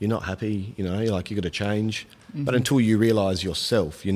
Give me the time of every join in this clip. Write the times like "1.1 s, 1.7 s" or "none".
none